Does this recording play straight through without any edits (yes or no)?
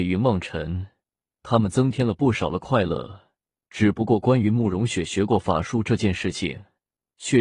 yes